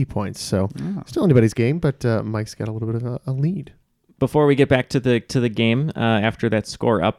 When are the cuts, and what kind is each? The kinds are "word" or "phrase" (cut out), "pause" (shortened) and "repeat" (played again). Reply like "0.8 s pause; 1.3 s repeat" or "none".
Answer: none